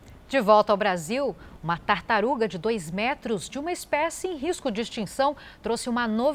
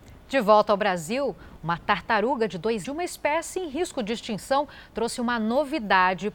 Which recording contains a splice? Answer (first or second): second